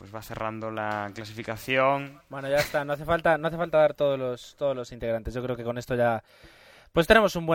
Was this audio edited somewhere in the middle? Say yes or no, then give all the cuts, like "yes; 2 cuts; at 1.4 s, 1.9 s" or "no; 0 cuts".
no; 0 cuts